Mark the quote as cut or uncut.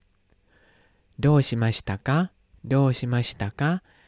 cut